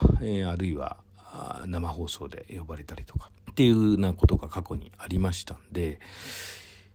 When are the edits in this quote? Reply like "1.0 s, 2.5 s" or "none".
3.4 s